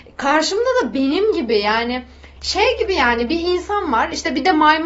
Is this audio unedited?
no; 1 cut; at 2.4 s

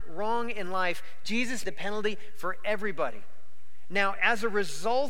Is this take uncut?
no; 1 cut; at 1.6 s

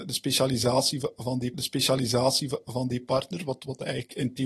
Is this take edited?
yes; 1 cut; at 1.5 s

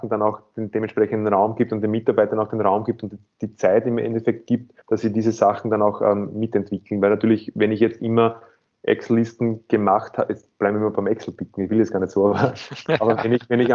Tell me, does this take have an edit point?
yes; 1 cut; at 4.8 s

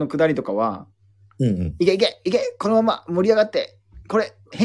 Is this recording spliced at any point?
no; 0 cuts

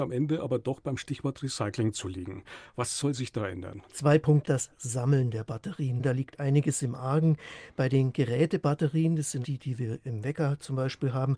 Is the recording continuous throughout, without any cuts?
no; 3 cuts; at 3.8 s, 4.4 s, 9.4 s

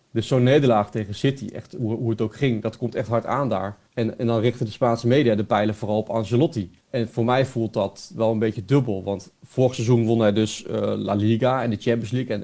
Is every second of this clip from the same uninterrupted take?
no; 2 cuts; at 3.9 s, 6.8 s

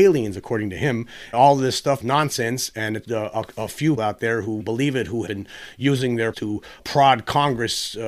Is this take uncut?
no; 8 cuts; at 1.3 s, 2.0 s, 3.0 s, 4.0 s, 4.6 s, 5.3 s, 6.3 s, 6.8 s

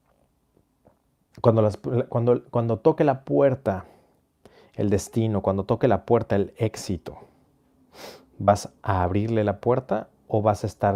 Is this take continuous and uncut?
yes; 0 cuts

